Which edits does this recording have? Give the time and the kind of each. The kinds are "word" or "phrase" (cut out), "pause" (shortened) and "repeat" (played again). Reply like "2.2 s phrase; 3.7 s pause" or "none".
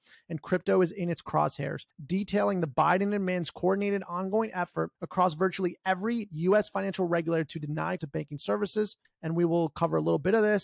1.9 s pause; 5.0 s pause; 8.0 s phrase; 9.0 s pause